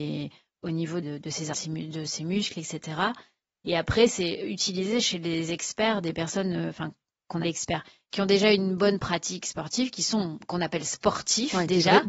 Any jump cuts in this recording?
yes; 3 cuts; at 1.0 s, 1.5 s, 7.4 s

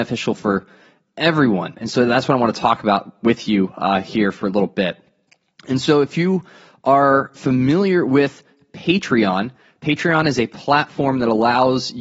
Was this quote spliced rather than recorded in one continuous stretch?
no; 0 cuts

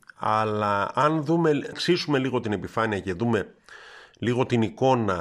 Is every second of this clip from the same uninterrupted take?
no; 1 cut; at 1.7 s

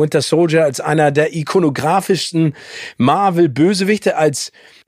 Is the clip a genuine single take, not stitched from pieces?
yes; 0 cuts

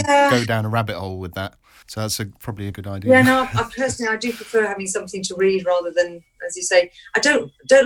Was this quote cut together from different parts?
yes; 1 cut; at 2.7 s

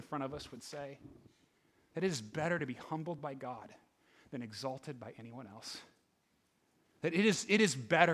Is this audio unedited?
yes; 0 cuts

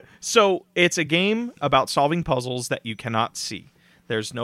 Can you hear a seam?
no; 0 cuts

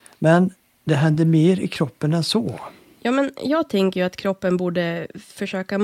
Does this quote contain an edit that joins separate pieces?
no; 0 cuts

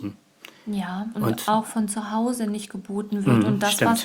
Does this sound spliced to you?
yes; 1 cut; at 1.1 s

